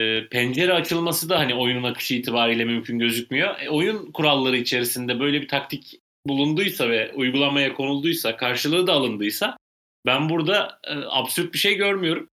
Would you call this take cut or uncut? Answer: uncut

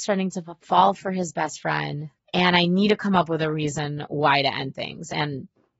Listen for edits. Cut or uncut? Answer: cut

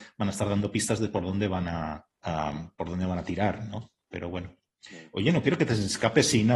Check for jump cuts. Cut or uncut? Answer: cut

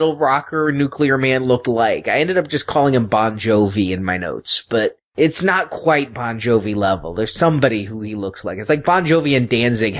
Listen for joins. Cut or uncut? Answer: cut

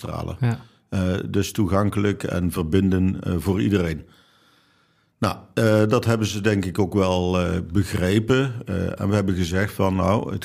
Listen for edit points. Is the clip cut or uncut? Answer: uncut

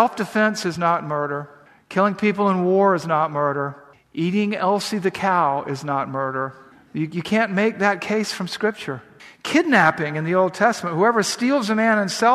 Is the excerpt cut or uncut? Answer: uncut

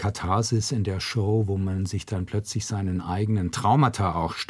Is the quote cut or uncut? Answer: uncut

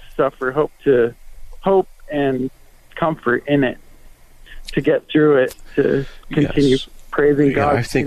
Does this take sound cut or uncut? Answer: uncut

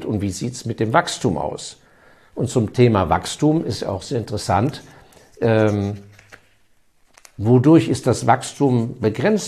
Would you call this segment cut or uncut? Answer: uncut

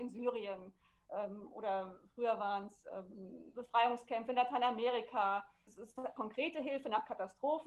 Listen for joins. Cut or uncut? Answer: cut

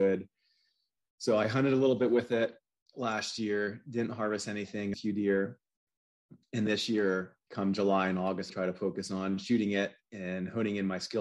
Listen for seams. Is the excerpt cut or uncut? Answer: cut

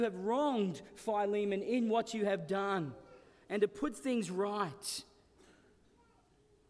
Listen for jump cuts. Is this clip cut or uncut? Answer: uncut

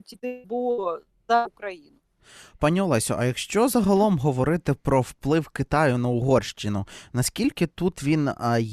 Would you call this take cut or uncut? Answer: uncut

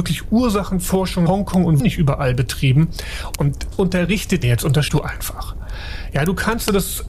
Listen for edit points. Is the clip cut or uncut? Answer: cut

